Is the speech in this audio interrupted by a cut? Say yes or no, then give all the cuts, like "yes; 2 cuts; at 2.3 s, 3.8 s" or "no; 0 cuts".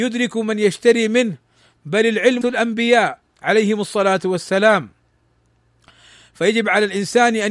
yes; 1 cut; at 2.4 s